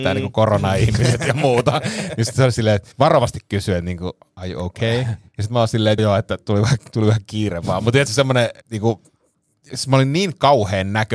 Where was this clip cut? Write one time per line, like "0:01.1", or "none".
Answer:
0:02.9
0:05.3
0:06.0
0:08.6